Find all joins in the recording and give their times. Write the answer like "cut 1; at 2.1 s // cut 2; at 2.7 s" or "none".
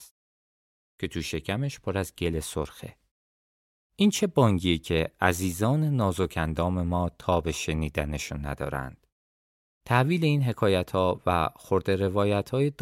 none